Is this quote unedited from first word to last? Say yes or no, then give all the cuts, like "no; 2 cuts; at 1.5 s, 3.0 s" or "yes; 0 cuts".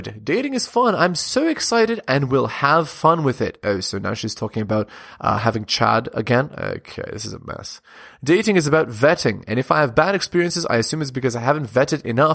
yes; 0 cuts